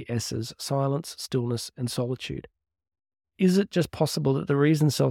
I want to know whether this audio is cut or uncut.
uncut